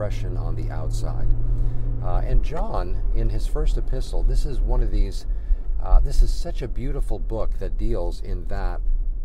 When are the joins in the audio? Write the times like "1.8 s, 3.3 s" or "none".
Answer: none